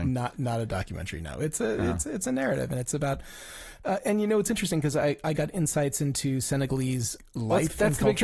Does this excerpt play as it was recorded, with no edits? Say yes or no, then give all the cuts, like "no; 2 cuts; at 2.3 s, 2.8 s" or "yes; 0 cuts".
yes; 0 cuts